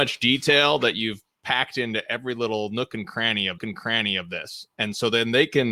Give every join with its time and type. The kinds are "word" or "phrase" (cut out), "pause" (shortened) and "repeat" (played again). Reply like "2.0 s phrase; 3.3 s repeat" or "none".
3.6 s repeat